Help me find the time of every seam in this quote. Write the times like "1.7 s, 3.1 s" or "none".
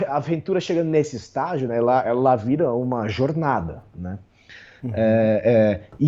none